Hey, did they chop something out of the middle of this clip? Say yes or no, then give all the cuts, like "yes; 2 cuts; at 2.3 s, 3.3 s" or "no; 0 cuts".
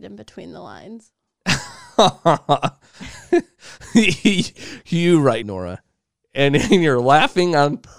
yes; 1 cut; at 5.4 s